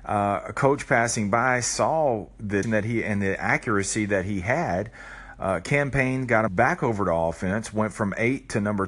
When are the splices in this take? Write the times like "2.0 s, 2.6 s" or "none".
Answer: 2.6 s, 6.5 s